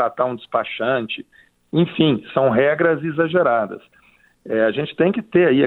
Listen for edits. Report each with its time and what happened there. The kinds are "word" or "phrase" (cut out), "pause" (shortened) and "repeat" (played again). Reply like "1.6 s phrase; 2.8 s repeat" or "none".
none